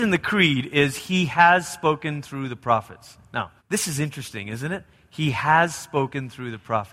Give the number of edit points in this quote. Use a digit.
1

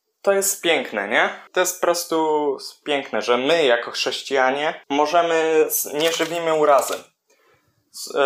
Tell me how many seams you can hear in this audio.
2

